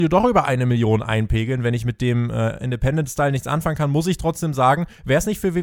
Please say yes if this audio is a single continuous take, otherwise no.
yes